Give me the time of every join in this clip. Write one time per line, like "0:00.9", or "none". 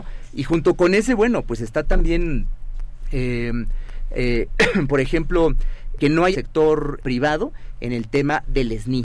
0:06.0
0:06.3
0:07.0